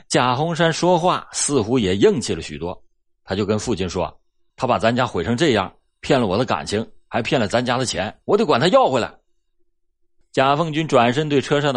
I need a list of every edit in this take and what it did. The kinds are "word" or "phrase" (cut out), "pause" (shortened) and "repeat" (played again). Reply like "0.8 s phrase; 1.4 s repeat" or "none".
8.2 s pause